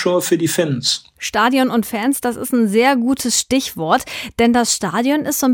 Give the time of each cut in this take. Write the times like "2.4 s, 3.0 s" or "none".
none